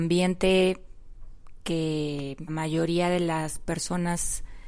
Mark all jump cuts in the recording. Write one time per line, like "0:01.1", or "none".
0:02.5

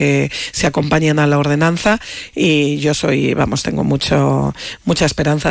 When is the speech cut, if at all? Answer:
none

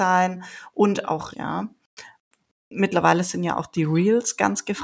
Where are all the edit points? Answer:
0:01.3

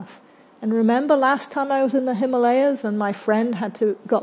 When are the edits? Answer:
none

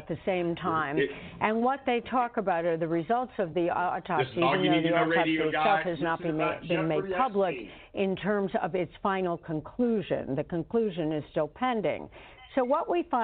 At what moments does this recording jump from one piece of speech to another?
none

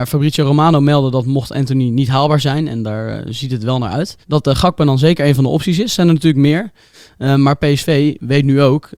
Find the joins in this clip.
0:04.2

